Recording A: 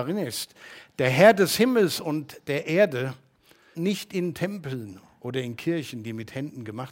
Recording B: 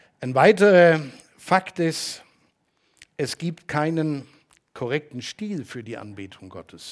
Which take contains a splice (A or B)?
A